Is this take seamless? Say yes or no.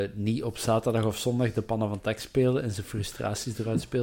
yes